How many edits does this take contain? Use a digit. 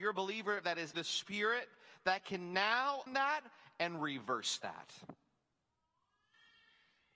2